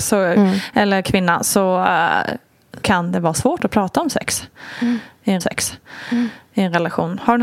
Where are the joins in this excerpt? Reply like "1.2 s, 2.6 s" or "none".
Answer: 2.8 s, 5.4 s

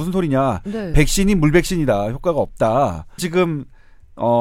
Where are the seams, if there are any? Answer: 3.2 s

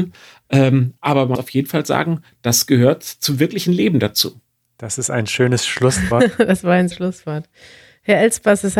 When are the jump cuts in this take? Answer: 1.3 s, 6.9 s

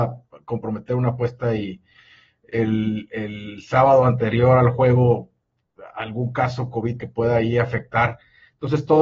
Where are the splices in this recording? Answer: 7.0 s

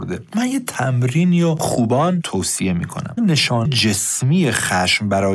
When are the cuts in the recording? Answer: 1.6 s, 2.2 s, 3.2 s, 3.7 s

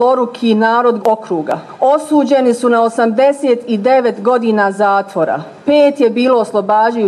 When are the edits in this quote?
1.0 s

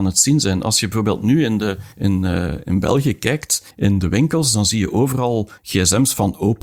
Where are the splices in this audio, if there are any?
1.9 s, 3.7 s, 5.6 s

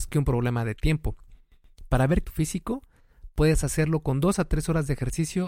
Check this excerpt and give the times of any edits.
2.2 s

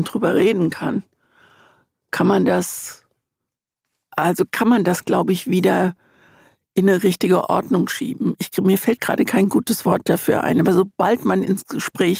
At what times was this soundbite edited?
none

